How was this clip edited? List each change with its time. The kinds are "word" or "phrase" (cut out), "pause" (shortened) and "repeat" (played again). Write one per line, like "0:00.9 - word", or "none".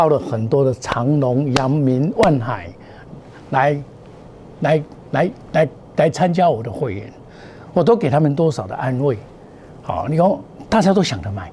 none